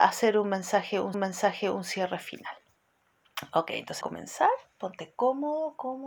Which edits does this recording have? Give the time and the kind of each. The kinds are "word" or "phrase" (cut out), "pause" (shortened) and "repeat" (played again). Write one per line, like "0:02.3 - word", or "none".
0:01.1 - repeat
0:04.0 - phrase